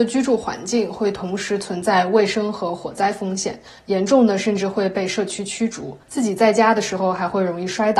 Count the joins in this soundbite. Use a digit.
1